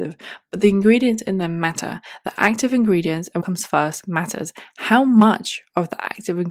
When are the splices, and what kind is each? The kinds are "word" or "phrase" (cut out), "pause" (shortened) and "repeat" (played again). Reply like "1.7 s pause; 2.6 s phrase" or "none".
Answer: 3.4 s word